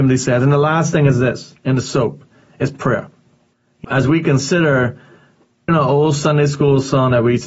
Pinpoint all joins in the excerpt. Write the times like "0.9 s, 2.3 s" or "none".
3.8 s, 5.7 s